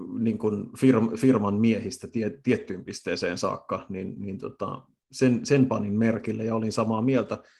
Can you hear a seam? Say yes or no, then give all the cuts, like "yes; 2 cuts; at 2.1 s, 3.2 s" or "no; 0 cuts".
no; 0 cuts